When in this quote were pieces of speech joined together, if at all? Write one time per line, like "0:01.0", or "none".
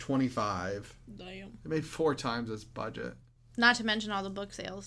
none